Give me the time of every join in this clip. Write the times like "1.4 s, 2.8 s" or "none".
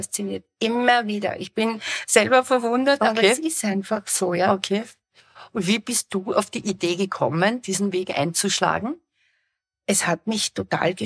none